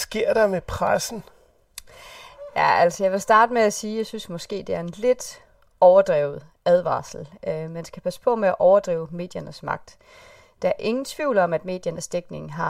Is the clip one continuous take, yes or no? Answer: yes